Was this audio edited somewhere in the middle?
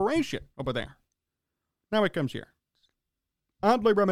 no; 0 cuts

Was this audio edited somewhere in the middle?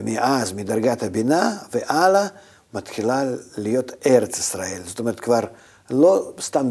no; 0 cuts

